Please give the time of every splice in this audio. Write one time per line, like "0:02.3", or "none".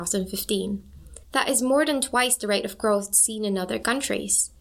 0:01.2